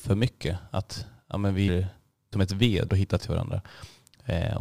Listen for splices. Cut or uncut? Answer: cut